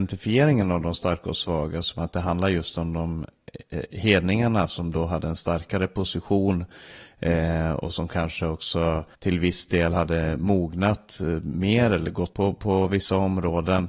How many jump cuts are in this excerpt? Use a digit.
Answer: 2